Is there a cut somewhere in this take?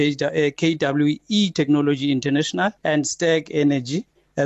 yes; 1 cut; at 2.8 s

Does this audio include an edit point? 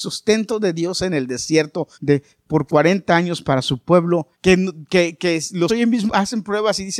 yes; 4 cuts; at 1.9 s, 4.3 s, 5.7 s, 6.1 s

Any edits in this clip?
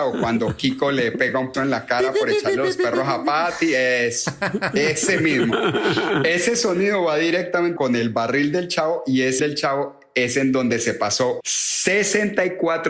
yes; 4 cuts; at 1.5 s, 7.8 s, 9.4 s, 11.4 s

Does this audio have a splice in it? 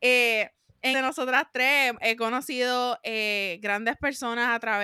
yes; 1 cut; at 0.9 s

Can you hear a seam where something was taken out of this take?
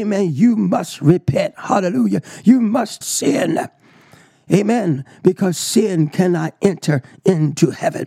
yes; 1 cut; at 3.0 s

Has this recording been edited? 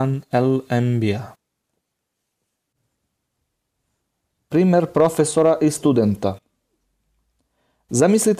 no; 0 cuts

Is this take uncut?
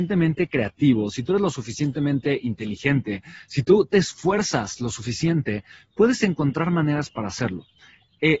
yes; 0 cuts

